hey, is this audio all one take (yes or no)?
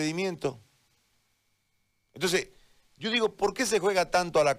yes